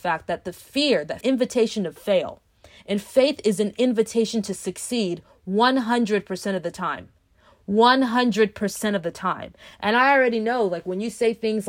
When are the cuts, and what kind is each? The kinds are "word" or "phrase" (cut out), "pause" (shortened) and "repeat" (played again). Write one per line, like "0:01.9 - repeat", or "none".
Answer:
0:01.2 - phrase